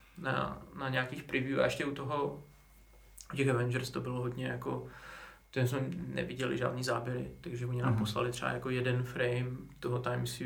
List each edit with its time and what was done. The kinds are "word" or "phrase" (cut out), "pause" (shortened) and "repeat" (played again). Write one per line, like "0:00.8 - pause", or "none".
none

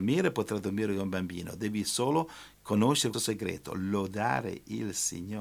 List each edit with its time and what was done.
0:03.1 - word

